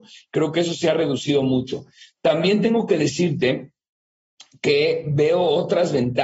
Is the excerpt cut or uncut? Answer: uncut